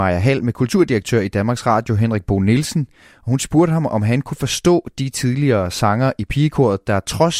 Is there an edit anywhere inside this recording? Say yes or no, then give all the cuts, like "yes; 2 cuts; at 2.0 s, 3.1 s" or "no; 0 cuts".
no; 0 cuts